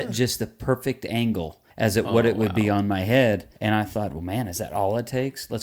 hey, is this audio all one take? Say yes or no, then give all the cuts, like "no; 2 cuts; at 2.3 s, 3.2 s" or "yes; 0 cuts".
no; 2 cuts; at 1.7 s, 3.6 s